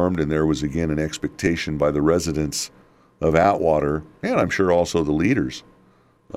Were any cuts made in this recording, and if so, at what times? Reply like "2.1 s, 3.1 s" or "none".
none